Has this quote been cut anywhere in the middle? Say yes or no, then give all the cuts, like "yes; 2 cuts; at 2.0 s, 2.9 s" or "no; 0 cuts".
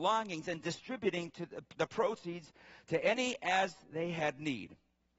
no; 0 cuts